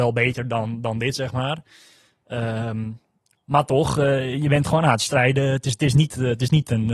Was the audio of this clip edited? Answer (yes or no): no